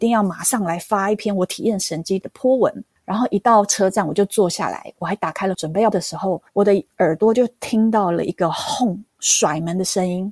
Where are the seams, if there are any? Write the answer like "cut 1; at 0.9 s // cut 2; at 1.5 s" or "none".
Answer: cut 1; at 2.2 s // cut 2; at 5.5 s // cut 3; at 5.9 s // cut 4; at 6.5 s

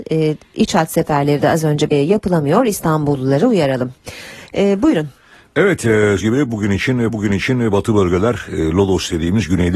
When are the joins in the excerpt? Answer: cut 1; at 1.9 s // cut 2; at 6.2 s // cut 3; at 7.1 s

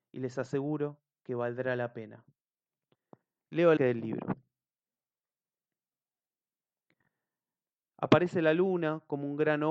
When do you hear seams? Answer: cut 1; at 3.8 s

